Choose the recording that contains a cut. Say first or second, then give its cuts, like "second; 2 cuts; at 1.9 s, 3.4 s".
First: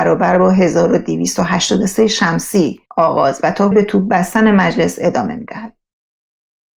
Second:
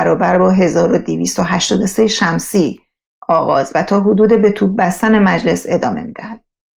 first; 2 cuts; at 2.9 s, 3.7 s